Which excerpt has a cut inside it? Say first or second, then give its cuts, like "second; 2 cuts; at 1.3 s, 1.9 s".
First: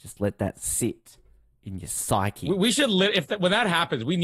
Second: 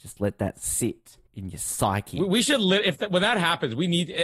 second; 1 cut; at 1.3 s